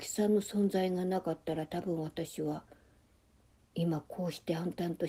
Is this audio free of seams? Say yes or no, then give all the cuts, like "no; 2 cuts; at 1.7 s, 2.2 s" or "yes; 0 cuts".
yes; 0 cuts